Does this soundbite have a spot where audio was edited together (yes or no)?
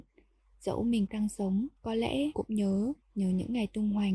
yes